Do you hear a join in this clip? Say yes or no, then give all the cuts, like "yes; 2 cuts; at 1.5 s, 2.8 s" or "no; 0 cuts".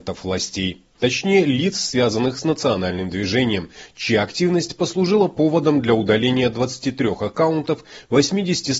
no; 0 cuts